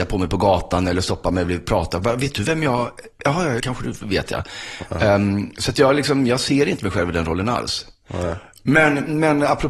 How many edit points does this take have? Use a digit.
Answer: 1